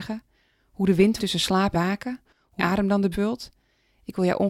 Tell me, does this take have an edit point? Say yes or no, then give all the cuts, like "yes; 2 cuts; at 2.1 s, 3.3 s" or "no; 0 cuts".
yes; 4 cuts; at 1.2 s, 1.7 s, 2.6 s, 3.1 s